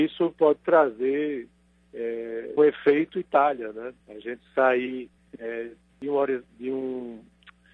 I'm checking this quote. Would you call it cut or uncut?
cut